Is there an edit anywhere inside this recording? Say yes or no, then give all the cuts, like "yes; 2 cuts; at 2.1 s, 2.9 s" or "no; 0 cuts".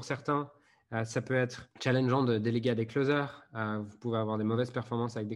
yes; 1 cut; at 1.7 s